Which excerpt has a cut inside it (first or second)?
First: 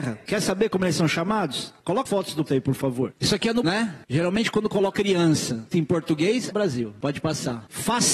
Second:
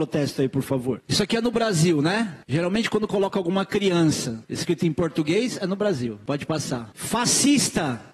first